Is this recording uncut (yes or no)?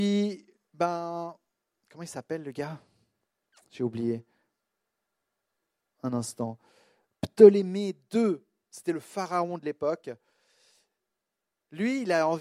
yes